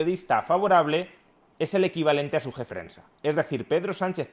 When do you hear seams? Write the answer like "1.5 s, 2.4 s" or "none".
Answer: 2.7 s